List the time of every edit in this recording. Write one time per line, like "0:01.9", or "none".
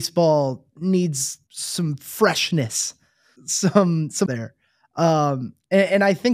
0:01.5
0:03.4
0:04.3